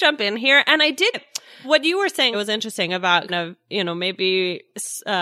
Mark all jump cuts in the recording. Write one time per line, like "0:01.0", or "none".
0:01.1
0:01.6
0:02.3
0:03.3